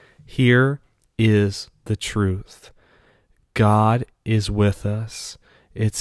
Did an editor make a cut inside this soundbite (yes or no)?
no